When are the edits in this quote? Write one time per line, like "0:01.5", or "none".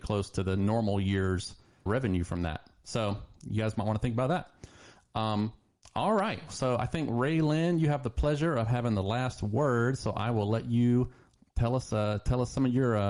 0:01.9